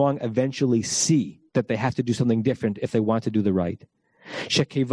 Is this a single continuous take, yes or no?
no